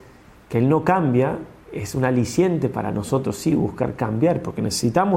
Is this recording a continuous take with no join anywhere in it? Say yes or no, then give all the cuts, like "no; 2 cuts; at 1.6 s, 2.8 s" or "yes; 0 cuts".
yes; 0 cuts